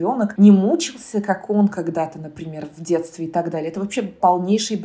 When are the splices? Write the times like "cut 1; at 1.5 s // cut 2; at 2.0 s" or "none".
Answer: none